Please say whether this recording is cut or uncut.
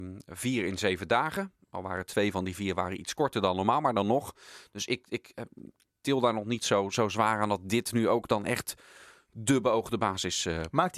uncut